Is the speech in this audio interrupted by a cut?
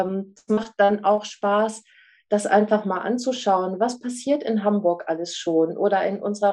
no; 0 cuts

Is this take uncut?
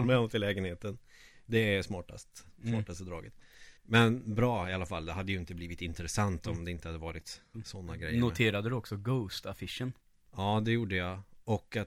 no; 2 cuts; at 3.8 s, 10.0 s

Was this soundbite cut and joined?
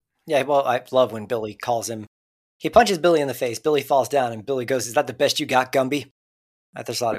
no; 0 cuts

